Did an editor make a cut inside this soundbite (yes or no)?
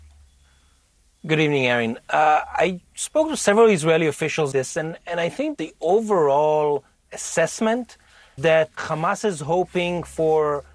yes